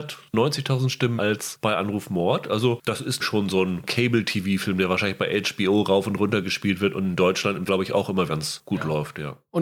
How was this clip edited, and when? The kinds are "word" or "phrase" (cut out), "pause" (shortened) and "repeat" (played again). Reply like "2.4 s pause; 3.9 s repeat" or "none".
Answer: 1.2 s word; 3.2 s word; 7.7 s word; 8.3 s word